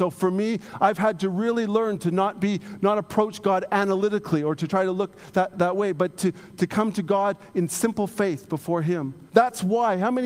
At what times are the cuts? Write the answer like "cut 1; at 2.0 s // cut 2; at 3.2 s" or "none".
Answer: cut 1; at 9.3 s